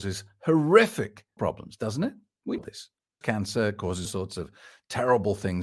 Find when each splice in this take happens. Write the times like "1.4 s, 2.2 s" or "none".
1.4 s, 2.6 s, 3.2 s, 4.1 s

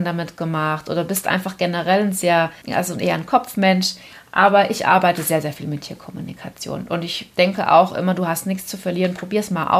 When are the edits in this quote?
2.6 s

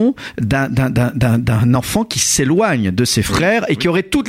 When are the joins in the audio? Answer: none

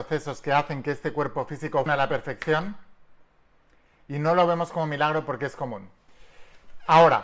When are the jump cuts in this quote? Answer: 1.9 s

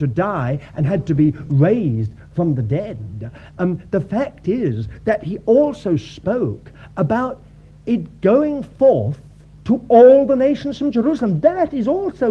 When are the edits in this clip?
none

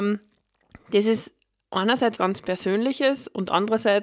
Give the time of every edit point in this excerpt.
2.2 s

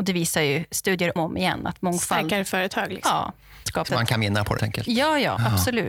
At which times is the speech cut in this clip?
1.2 s, 3.9 s, 4.6 s

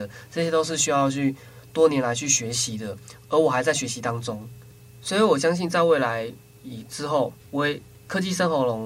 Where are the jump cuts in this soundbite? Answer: 7.4 s

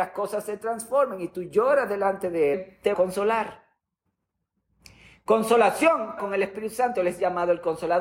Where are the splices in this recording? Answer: 2.5 s, 2.9 s, 6.2 s

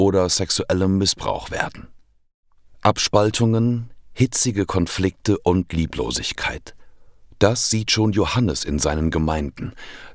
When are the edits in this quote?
none

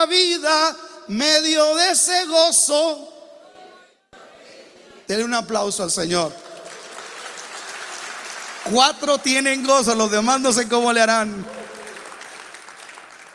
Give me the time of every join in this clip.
none

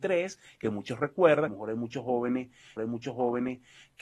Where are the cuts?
1.5 s, 2.8 s

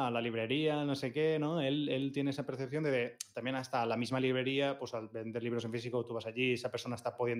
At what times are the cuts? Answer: none

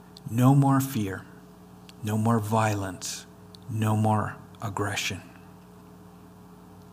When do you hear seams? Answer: 1.5 s, 3.3 s

